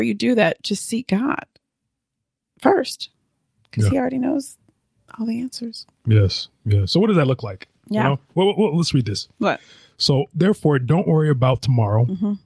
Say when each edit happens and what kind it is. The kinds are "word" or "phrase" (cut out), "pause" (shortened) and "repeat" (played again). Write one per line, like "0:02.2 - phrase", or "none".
none